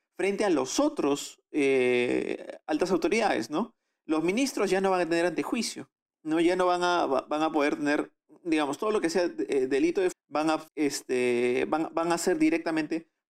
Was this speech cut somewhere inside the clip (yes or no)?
yes